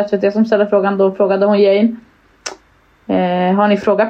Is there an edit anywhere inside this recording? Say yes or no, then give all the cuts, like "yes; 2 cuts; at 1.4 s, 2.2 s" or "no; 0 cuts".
no; 0 cuts